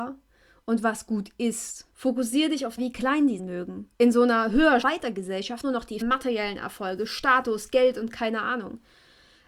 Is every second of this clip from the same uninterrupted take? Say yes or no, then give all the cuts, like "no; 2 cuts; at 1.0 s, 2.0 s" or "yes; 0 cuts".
no; 7 cuts; at 1.9 s, 2.8 s, 3.4 s, 3.9 s, 4.8 s, 5.6 s, 6.0 s